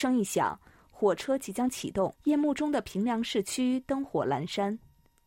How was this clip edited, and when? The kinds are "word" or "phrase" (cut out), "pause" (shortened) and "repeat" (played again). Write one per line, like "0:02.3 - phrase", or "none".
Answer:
0:02.2 - pause

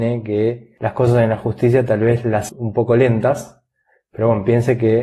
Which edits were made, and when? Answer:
0:02.5 - word

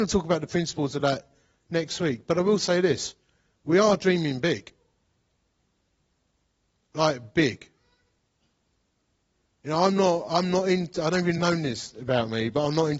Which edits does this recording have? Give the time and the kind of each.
none

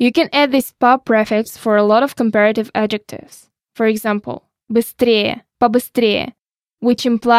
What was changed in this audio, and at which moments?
0:05.5 - word

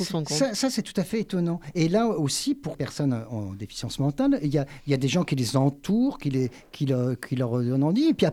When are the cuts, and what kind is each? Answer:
0:02.7 - word

